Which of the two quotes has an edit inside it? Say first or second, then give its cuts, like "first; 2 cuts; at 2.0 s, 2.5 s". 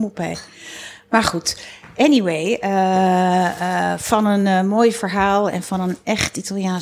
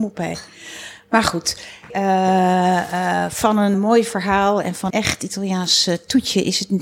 second; 3 cuts; at 1.9 s, 3.7 s, 4.9 s